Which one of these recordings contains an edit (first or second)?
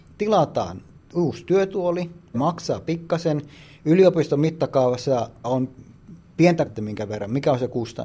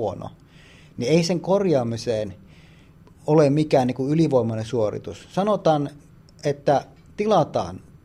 first